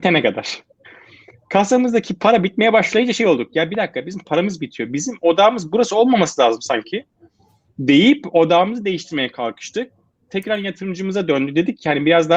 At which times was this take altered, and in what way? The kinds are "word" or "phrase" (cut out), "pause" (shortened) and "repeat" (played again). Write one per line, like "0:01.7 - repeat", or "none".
none